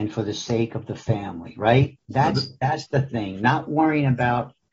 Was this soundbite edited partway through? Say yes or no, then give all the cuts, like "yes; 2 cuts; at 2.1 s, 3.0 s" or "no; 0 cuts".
no; 0 cuts